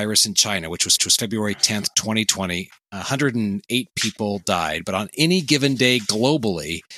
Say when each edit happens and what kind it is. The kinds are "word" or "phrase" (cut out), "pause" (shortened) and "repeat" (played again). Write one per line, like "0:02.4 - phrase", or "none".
0:01.0 - repeat